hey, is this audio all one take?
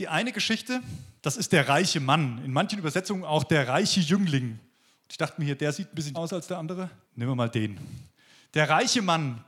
no; 3 cuts; at 1.2 s, 6.1 s, 7.0 s

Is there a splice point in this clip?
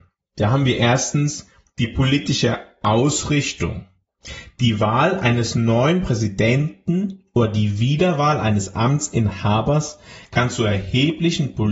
no; 0 cuts

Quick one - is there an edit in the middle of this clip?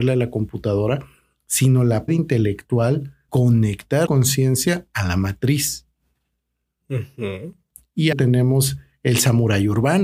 yes; 4 cuts; at 2.1 s, 3.3 s, 4.1 s, 8.1 s

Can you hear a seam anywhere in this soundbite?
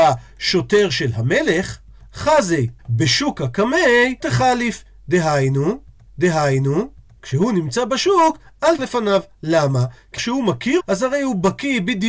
yes; 7 cuts; at 2.1 s, 2.8 s, 4.2 s, 6.1 s, 8.8 s, 10.2 s, 10.8 s

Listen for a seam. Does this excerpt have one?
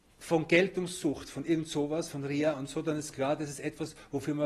no; 0 cuts

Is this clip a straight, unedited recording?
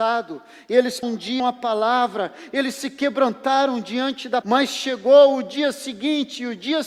no; 3 cuts; at 1.0 s, 1.4 s, 4.4 s

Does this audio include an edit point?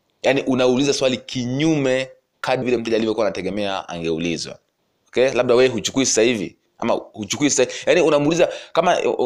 yes; 2 cuts; at 2.6 s, 4.8 s

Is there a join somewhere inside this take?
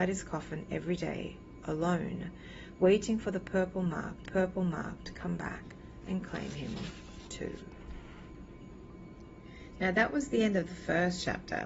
yes; 1 cut; at 4.2 s

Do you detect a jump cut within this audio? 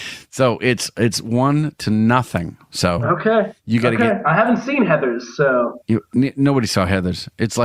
no; 0 cuts

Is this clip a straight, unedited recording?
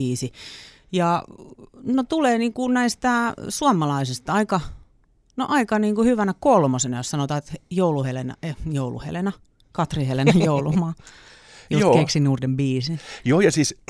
yes; 0 cuts

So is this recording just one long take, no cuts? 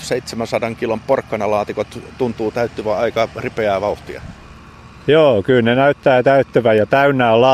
yes; 0 cuts

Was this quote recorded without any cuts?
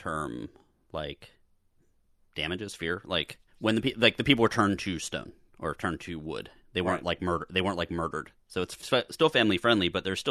no; 1 cut; at 3.5 s

